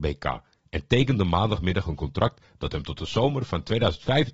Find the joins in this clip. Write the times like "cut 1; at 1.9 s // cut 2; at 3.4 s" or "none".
none

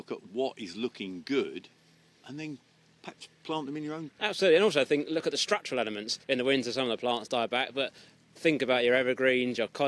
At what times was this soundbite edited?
cut 1; at 4.1 s // cut 2; at 6.2 s

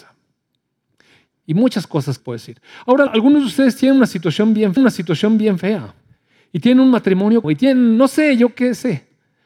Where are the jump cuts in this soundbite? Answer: cut 1; at 2.2 s // cut 2; at 3.1 s // cut 3; at 4.8 s // cut 4; at 7.4 s

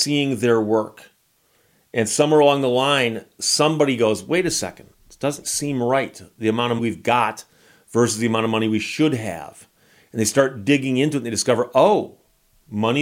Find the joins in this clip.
cut 1; at 4.9 s // cut 2; at 5.4 s // cut 3; at 6.8 s

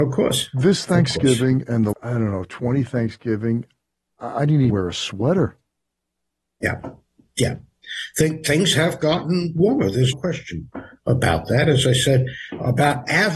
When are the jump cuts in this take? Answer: cut 1; at 1.9 s // cut 2; at 4.7 s // cut 3; at 10.1 s

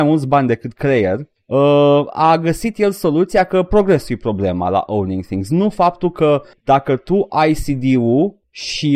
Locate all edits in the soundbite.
none

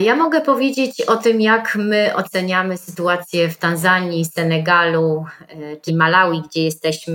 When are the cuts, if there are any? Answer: cut 1; at 5.9 s

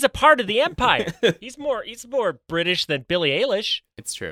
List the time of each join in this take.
none

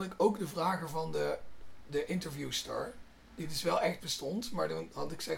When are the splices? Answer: none

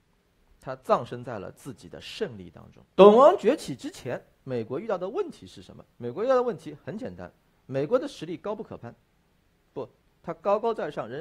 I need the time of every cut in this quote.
cut 1; at 2.9 s // cut 2; at 5.9 s

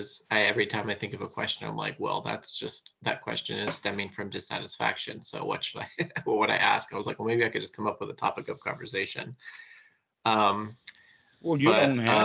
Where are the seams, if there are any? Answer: none

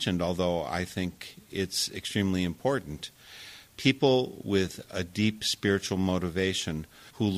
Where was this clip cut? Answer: none

